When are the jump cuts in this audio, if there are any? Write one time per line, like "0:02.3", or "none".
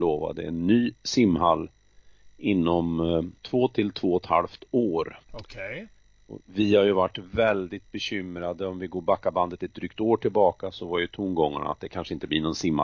0:03.4
0:05.2